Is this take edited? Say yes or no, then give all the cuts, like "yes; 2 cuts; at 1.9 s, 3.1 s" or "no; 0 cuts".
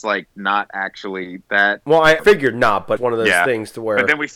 yes; 2 cuts; at 2.2 s, 3.0 s